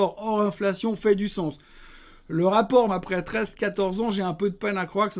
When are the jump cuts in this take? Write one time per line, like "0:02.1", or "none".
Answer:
0:02.9